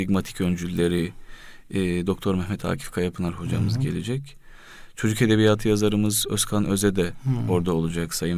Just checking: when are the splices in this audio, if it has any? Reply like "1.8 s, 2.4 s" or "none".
none